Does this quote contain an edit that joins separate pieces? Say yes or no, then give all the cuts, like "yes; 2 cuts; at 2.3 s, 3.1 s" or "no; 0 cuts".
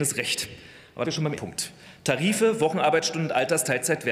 yes; 2 cuts; at 1.0 s, 1.4 s